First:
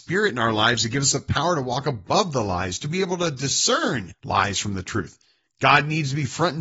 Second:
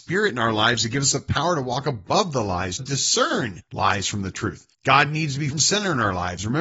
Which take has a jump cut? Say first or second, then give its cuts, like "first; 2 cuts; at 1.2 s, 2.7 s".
second; 3 cuts; at 2.8 s, 4.7 s, 5.5 s